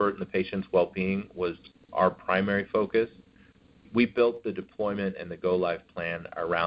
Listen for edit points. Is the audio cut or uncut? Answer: uncut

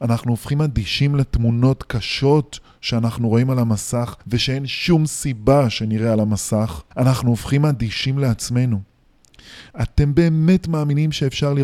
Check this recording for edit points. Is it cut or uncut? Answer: cut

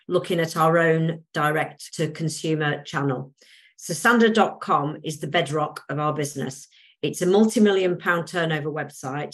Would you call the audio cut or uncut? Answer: uncut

